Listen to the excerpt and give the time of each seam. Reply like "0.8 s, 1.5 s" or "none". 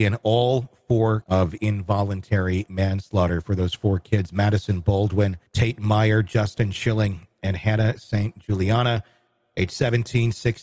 1.2 s, 5.5 s